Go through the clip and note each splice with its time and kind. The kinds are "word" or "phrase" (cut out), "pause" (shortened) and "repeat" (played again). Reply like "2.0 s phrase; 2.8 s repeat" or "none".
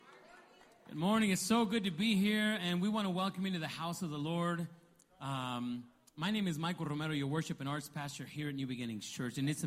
none